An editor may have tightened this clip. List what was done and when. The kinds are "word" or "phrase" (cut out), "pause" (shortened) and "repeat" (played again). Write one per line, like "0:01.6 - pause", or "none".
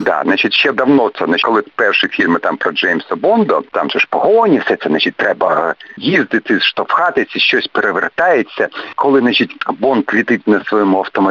none